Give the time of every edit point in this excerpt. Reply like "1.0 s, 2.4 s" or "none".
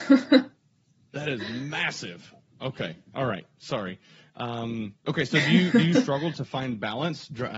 none